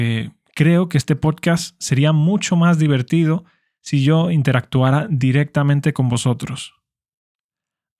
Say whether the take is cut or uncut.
uncut